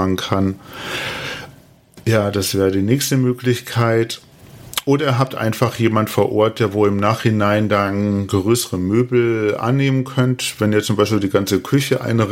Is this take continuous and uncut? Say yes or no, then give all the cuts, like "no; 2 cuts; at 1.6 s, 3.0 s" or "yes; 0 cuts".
yes; 0 cuts